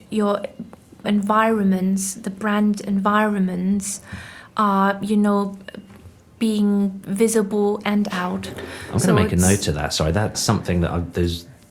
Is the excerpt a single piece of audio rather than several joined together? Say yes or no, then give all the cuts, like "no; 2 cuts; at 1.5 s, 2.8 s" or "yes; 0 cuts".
no; 3 cuts; at 1.0 s, 7.8 s, 10.3 s